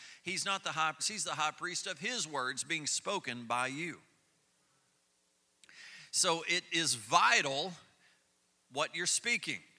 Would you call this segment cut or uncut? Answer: cut